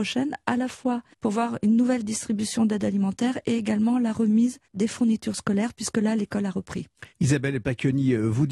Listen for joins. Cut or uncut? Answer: cut